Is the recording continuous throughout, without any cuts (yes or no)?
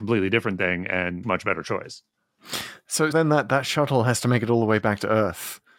no